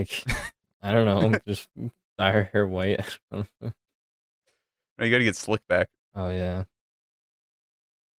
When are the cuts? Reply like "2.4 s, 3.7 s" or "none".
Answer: 2.0 s, 5.9 s